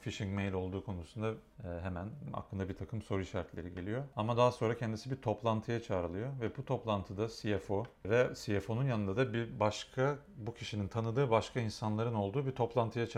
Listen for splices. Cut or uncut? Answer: uncut